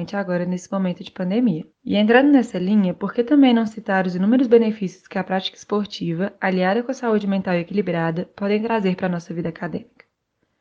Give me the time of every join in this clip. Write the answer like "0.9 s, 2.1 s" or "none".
1.7 s

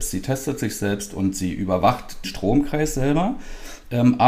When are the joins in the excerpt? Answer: 2.2 s

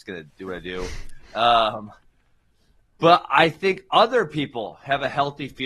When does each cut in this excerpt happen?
none

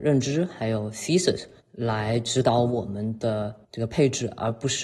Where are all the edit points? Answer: 1.6 s, 3.6 s

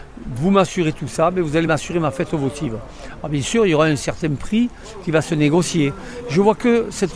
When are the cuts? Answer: none

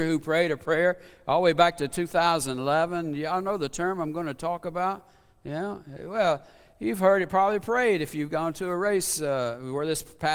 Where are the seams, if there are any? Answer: none

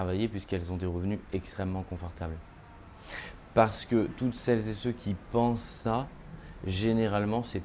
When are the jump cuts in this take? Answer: none

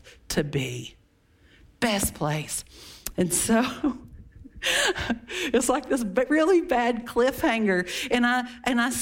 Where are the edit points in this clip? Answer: none

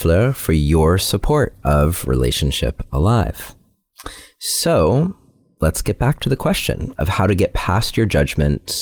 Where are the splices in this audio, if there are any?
none

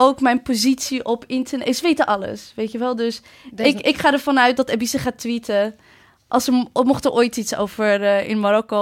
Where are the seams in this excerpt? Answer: none

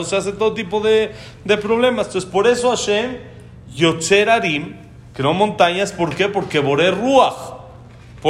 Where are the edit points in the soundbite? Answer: none

